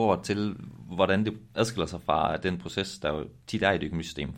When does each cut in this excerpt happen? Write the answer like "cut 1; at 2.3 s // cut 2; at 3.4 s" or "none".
none